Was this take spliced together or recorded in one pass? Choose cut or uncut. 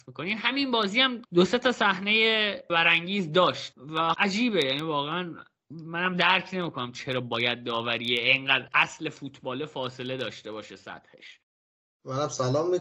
cut